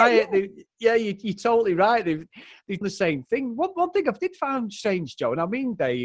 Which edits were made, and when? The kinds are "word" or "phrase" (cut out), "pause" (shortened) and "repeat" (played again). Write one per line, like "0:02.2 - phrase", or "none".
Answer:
0:02.8 - word